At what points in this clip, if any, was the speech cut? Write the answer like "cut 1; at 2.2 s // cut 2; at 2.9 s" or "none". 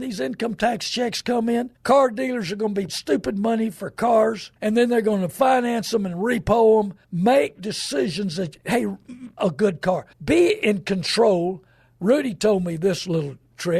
cut 1; at 1.8 s // cut 2; at 2.9 s // cut 3; at 4.6 s // cut 4; at 7.0 s // cut 5; at 9.4 s // cut 6; at 10.1 s